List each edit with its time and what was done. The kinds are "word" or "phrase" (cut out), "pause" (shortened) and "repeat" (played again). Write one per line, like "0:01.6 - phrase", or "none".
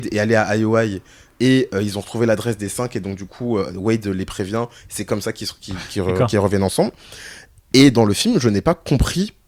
none

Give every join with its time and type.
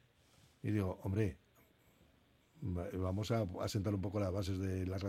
none

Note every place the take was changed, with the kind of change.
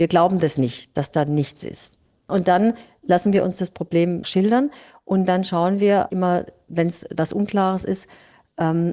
0:04.2 - word
0:06.1 - word

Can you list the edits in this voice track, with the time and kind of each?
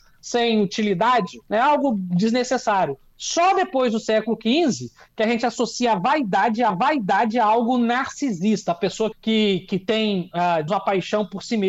0:01.4 - pause
0:06.7 - repeat
0:09.1 - word
0:10.7 - word

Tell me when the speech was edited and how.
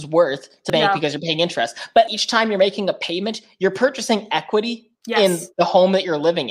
0:02.1 - word
0:04.9 - pause

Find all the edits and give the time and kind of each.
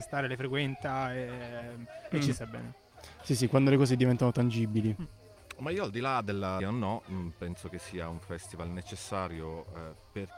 0:06.6 - phrase

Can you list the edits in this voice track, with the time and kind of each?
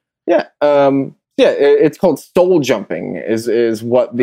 0:01.2 - pause

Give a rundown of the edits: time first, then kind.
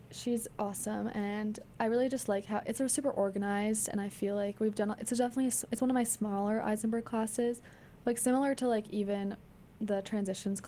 none

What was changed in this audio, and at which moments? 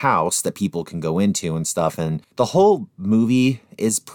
none

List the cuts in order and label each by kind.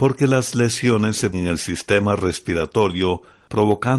0:01.3 - word

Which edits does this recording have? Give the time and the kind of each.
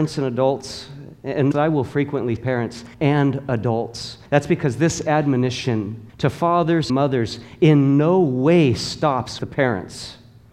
0:01.5 - word
0:02.4 - word
0:02.9 - pause
0:04.3 - pause
0:06.1 - pause
0:06.9 - word
0:09.4 - word

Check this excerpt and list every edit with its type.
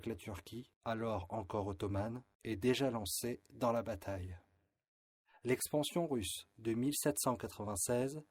none

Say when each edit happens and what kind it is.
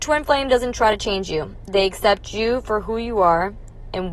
none

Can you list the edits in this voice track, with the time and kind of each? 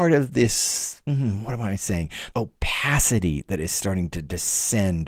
0:02.3 - word

